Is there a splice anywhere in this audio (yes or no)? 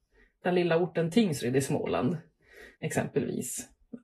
yes